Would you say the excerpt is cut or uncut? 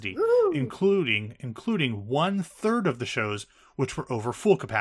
uncut